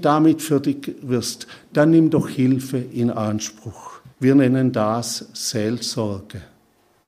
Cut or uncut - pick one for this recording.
cut